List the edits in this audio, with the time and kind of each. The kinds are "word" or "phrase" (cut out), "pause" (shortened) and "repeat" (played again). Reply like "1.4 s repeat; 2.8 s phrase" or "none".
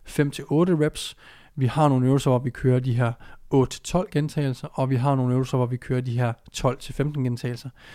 none